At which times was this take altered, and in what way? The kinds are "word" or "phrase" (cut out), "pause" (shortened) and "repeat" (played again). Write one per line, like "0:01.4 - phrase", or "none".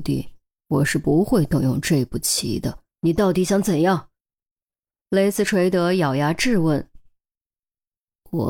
0:02.9 - pause